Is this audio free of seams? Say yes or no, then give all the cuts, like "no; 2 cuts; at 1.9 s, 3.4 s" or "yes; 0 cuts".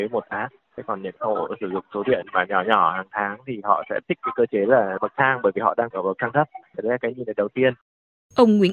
yes; 0 cuts